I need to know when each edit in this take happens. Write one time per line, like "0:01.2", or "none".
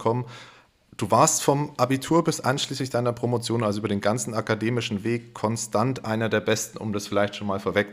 none